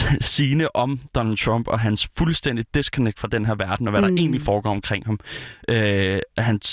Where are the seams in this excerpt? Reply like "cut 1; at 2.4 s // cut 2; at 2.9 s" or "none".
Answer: none